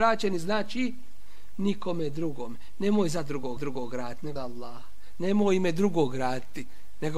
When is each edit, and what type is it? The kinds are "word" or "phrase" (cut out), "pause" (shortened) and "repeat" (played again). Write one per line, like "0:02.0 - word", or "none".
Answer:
0:03.6 - repeat
0:04.4 - word

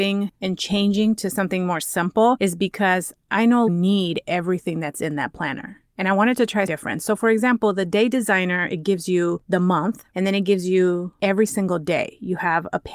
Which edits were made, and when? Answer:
0:03.7 - word
0:06.7 - word

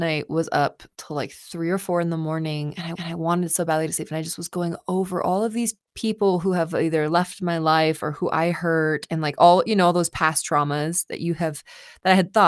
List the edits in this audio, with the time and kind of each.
0:03.0 - repeat
0:05.9 - pause

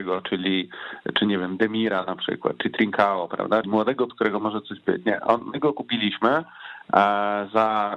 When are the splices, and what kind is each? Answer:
0:03.6 - word
0:04.1 - word

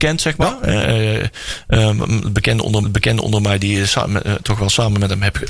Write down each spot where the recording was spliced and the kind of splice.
0:02.8 - repeat

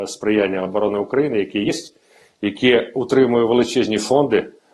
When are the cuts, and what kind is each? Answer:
none

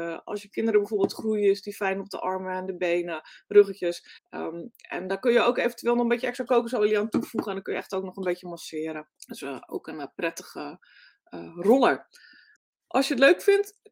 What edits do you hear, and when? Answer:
0:04.2 - pause
0:09.2 - pause
0:12.6 - pause

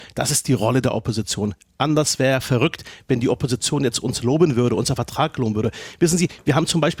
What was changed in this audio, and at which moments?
none

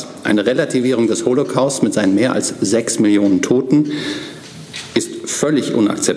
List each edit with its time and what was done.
none

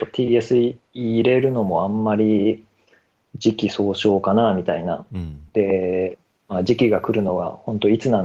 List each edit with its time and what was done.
none

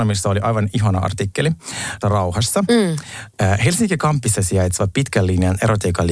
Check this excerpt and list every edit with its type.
0:02.0 - phrase

